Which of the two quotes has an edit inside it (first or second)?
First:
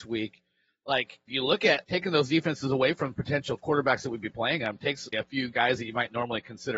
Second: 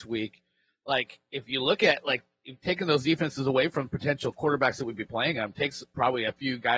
first